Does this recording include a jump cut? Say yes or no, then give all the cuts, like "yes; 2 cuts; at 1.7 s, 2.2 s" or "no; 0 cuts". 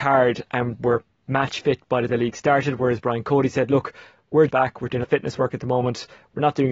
yes; 3 cuts; at 2.1 s, 4.5 s, 5.0 s